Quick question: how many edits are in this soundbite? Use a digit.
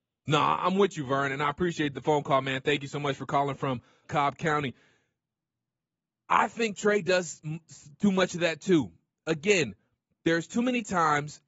1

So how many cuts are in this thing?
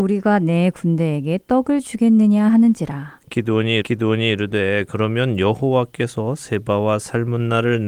1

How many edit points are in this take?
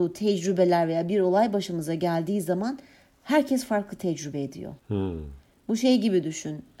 1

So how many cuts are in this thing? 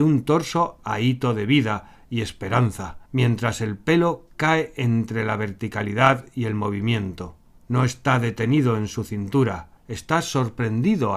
3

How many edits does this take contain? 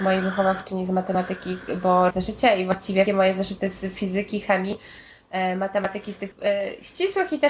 3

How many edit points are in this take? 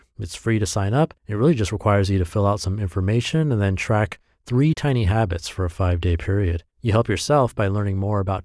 2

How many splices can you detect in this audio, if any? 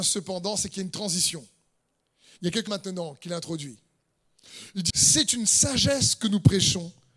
2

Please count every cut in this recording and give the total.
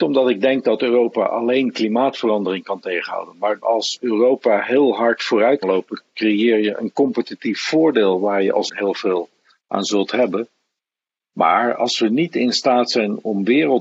3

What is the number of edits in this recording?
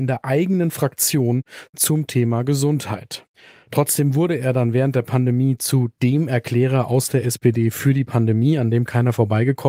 0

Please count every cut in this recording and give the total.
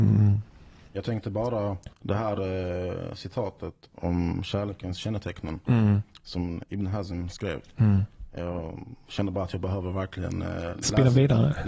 1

